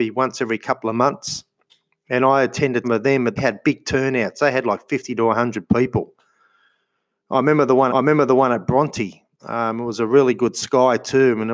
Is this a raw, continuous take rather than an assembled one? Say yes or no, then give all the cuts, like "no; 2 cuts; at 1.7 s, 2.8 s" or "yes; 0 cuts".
no; 4 cuts; at 2.8 s, 3.4 s, 7.9 s, 9.3 s